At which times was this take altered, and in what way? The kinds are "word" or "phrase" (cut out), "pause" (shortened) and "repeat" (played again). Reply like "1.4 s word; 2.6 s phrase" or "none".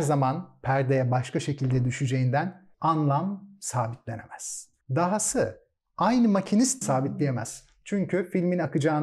2.7 s pause; 4.8 s pause; 6.8 s phrase